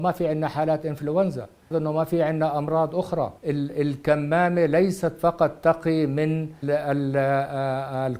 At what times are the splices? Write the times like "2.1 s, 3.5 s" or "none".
1.7 s, 3.4 s, 6.6 s

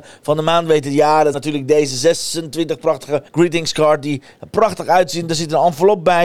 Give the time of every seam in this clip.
1.3 s, 3.3 s

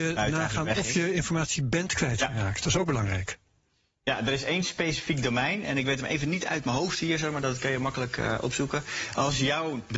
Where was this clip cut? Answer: none

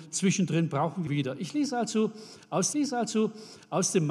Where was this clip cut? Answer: 1.1 s, 2.7 s

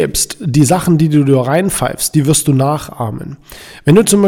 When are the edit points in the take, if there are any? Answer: none

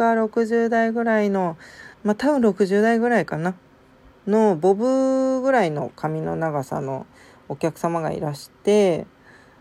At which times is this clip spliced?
1.9 s

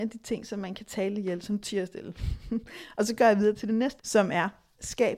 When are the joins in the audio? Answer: 4.0 s

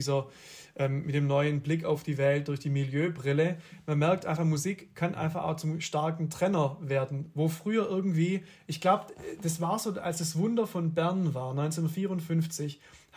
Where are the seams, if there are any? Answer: none

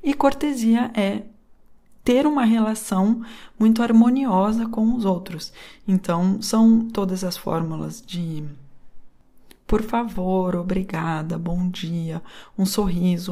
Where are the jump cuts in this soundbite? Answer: none

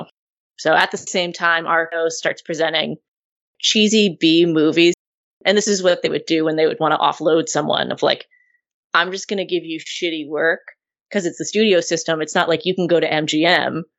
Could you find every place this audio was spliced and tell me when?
none

